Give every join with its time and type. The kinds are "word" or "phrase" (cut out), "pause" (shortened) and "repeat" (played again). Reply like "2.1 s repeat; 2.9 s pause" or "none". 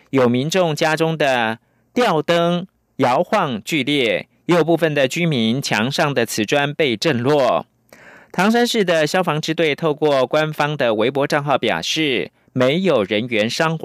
none

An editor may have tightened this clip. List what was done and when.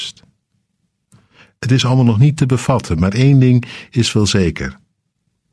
none

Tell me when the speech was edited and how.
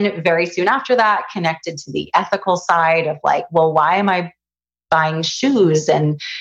none

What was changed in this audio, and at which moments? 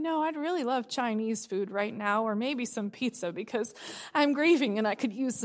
none

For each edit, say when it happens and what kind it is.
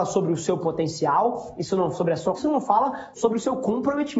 1.9 s word; 2.4 s word

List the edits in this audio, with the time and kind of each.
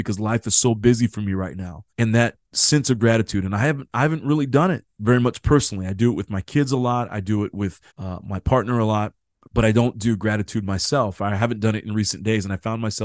1.9 s pause; 4.9 s pause; 7.9 s pause; 9.3 s pause

